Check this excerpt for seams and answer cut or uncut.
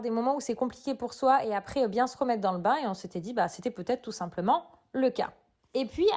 uncut